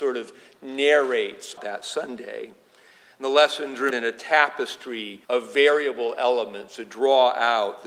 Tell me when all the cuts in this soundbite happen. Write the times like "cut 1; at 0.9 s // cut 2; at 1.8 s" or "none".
cut 1; at 1.6 s // cut 2; at 3.9 s // cut 3; at 5.2 s